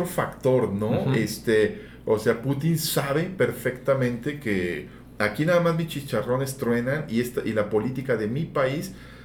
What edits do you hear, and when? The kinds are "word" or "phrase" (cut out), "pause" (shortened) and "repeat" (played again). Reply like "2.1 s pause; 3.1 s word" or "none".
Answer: none